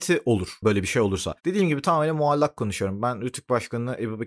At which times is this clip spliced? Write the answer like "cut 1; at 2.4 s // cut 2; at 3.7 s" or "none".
cut 1; at 1.4 s